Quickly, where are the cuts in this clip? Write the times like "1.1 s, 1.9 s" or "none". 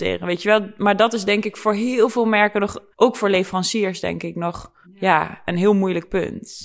2.9 s, 4.8 s